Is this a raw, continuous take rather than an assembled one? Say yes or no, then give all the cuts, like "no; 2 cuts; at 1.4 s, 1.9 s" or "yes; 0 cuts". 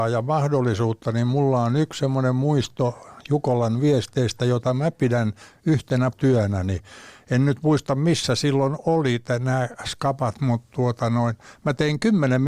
no; 1 cut; at 6.1 s